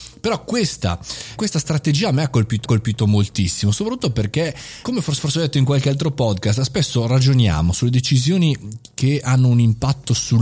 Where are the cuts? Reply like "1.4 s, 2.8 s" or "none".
1.4 s, 2.6 s, 4.8 s, 5.2 s